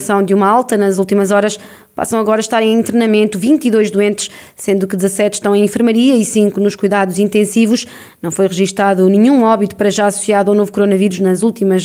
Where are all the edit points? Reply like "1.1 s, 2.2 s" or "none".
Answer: none